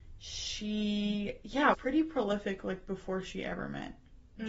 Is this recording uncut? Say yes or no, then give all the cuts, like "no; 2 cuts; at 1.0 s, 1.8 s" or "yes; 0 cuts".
no; 1 cut; at 1.7 s